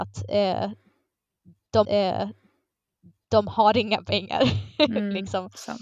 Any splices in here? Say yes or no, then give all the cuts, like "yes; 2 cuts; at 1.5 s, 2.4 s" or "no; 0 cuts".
yes; 1 cut; at 1.8 s